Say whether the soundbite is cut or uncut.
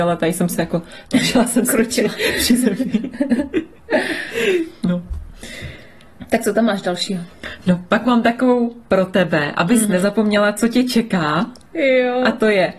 uncut